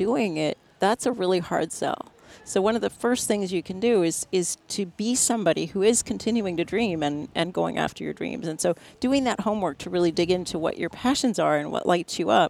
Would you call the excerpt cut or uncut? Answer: uncut